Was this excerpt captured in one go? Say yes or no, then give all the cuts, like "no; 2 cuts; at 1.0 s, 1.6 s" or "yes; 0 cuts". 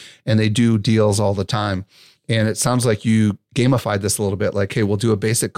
yes; 0 cuts